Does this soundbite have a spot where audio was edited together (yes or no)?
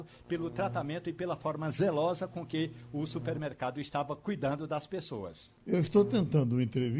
yes